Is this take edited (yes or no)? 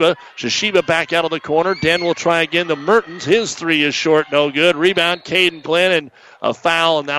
no